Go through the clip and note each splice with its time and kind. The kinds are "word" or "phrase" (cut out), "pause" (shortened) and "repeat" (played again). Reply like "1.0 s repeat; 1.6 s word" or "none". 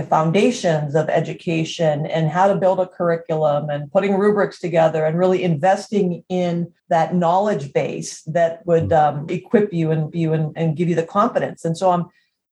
6.8 s pause; 9.3 s word; 10.1 s repeat